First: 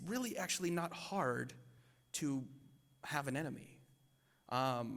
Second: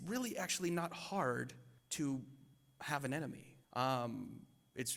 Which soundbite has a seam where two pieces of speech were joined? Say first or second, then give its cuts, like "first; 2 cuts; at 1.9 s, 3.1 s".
second; 2 cuts; at 1.8 s, 3.6 s